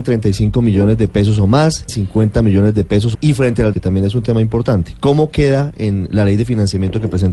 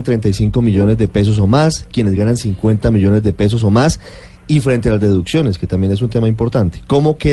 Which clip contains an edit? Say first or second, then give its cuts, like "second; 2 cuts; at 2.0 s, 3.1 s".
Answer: first; 3 cuts; at 1.9 s, 3.1 s, 3.7 s